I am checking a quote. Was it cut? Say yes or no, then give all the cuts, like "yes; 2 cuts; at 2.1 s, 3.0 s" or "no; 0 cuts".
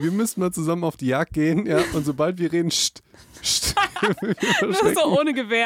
no; 0 cuts